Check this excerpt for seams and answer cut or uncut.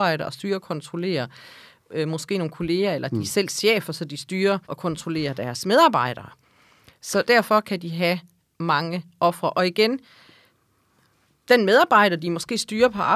cut